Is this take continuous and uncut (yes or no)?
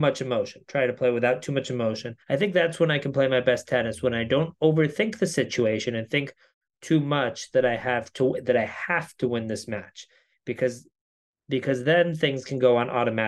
no